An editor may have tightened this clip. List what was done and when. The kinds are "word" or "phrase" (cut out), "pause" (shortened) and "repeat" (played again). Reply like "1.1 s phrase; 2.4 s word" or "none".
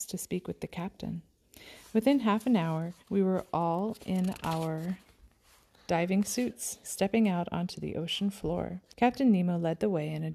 3.0 s pause; 8.9 s pause